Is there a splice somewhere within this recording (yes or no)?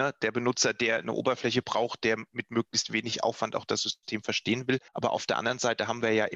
yes